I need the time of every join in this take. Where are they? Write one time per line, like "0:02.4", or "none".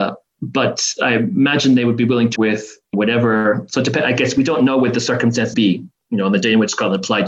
0:02.4
0:02.9
0:05.5